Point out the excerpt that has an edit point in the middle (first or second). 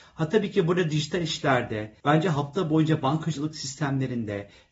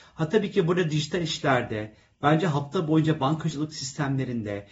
first